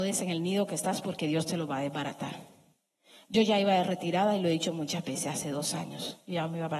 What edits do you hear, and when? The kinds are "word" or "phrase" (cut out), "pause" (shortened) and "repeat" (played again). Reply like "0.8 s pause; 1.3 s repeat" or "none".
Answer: none